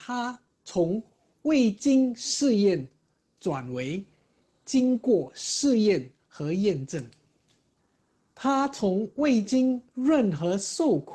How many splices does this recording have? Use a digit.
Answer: 0